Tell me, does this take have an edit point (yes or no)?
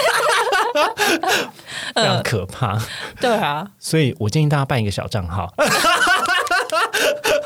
no